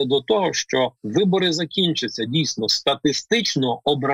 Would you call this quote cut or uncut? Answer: cut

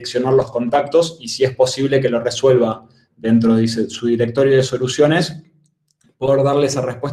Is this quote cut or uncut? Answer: uncut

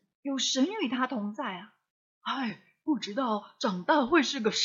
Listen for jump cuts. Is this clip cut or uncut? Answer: uncut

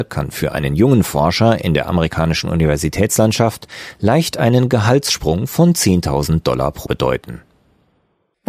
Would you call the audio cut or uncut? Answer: cut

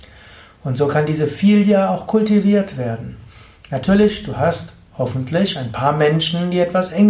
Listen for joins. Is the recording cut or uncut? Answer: uncut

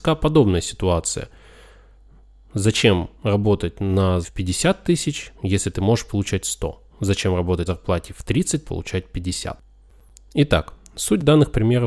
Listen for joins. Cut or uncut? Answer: cut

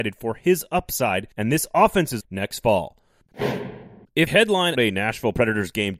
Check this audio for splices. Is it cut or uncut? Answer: cut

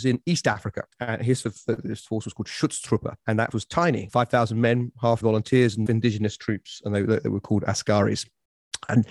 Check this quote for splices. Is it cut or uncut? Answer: cut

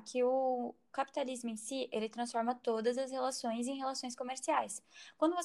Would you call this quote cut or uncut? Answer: uncut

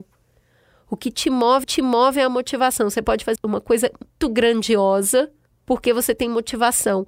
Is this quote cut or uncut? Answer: cut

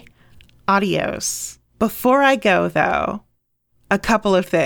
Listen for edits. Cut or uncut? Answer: cut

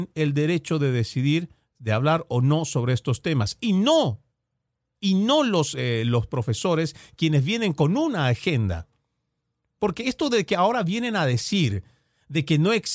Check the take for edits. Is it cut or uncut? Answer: uncut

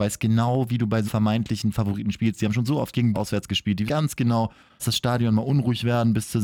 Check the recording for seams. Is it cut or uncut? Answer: cut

